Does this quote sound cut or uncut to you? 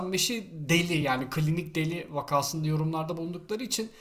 uncut